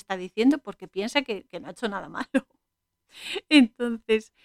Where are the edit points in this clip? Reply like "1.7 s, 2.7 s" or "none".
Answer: none